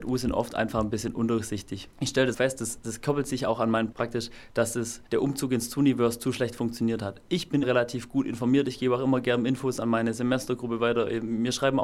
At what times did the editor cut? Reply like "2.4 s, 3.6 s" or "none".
1.9 s, 2.3 s, 3.9 s, 5.1 s, 7.6 s